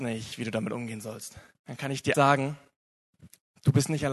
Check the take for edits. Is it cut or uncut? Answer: cut